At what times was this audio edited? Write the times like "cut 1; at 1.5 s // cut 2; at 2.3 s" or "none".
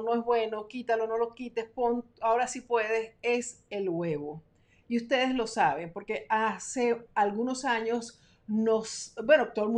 none